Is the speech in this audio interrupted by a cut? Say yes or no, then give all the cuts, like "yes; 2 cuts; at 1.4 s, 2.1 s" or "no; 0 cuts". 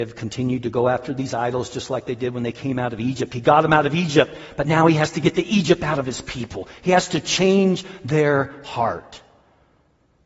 no; 0 cuts